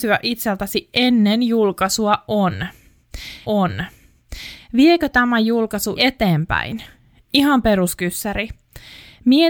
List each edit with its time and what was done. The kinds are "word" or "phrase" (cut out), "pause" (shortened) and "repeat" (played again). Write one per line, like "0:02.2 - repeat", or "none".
0:03.4 - repeat
0:05.9 - word